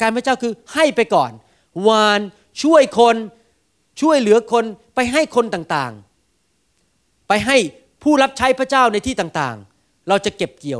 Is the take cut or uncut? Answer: uncut